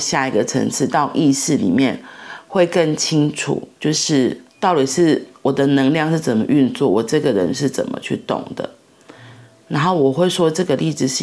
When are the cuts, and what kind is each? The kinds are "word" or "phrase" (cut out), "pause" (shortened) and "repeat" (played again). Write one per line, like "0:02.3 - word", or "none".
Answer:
none